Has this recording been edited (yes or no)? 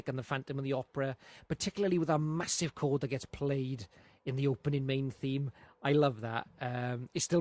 no